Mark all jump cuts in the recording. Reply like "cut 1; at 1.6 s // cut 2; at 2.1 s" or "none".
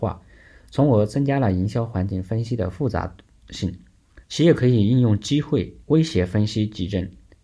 cut 1; at 4.2 s // cut 2; at 5.8 s